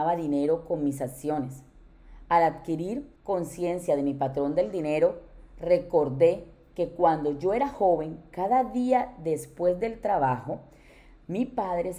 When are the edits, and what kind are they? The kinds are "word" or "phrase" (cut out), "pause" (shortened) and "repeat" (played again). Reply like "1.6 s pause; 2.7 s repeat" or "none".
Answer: 3.2 s pause